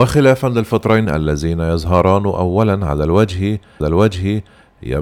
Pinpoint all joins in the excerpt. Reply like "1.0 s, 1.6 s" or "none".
1.0 s, 3.8 s